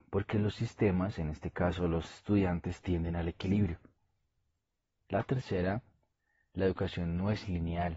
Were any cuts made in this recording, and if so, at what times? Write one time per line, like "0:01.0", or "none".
none